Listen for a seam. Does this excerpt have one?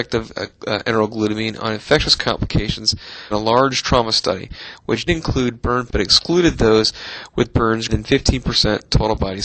yes; 4 cuts; at 3.3 s, 5.1 s, 5.9 s, 7.9 s

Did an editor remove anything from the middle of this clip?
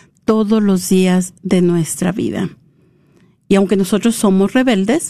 no; 0 cuts

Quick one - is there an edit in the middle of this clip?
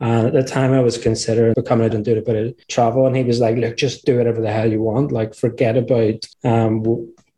yes; 5 cuts; at 1.5 s, 1.9 s, 2.6 s, 4.0 s, 6.3 s

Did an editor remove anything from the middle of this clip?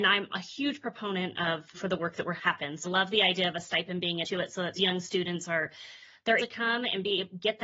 yes; 6 cuts; at 1.7 s, 2.4 s, 2.8 s, 4.2 s, 4.7 s, 6.4 s

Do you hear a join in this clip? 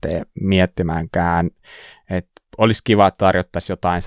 no; 0 cuts

